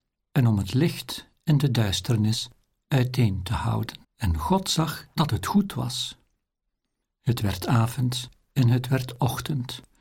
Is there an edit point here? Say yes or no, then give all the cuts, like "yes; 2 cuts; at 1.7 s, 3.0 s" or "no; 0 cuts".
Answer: yes; 1 cut; at 4.0 s